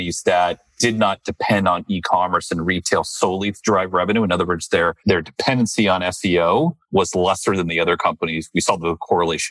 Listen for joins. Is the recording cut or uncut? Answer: cut